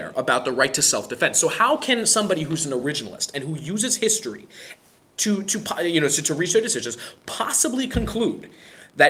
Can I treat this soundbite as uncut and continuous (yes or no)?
yes